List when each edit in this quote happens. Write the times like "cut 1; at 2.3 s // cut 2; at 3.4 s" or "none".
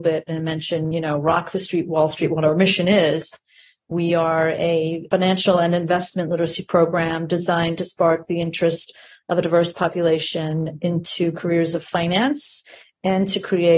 none

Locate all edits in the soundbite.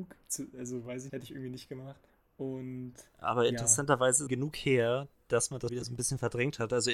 cut 1; at 1.1 s // cut 2; at 2.1 s // cut 3; at 4.3 s // cut 4; at 5.7 s

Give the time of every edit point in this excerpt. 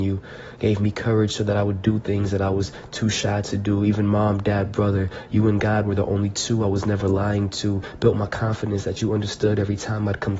none

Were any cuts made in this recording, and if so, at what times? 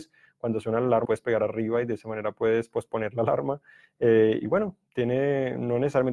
cut 1; at 1.1 s

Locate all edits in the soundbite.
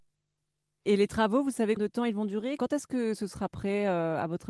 cut 1; at 1.8 s

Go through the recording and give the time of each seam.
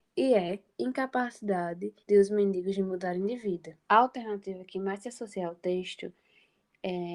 cut 1; at 2.0 s // cut 2; at 3.8 s

